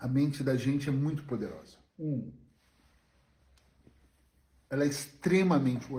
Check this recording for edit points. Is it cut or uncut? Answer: cut